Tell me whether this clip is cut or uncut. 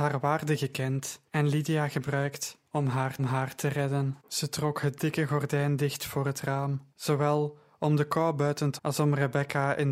cut